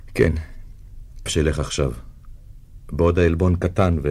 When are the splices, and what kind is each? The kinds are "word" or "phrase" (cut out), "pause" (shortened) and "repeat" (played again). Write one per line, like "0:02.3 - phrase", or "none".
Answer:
0:01.3 - word